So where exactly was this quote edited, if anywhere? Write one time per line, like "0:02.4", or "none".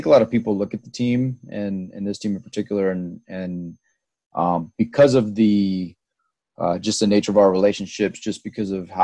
none